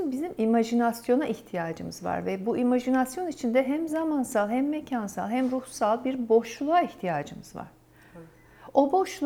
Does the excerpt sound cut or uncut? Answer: uncut